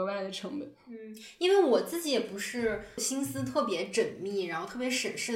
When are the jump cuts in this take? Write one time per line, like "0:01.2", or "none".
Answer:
none